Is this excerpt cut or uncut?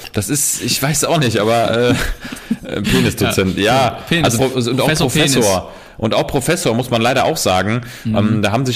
cut